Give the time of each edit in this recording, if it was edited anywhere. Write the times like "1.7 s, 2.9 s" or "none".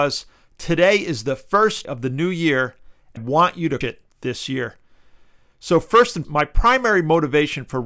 1.8 s, 3.2 s, 3.8 s, 6.2 s